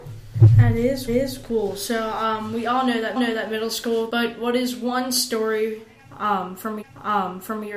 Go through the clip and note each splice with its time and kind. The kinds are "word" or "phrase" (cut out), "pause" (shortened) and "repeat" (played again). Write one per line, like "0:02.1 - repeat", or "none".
0:01.1 - repeat
0:03.2 - repeat
0:04.1 - phrase
0:06.8 - repeat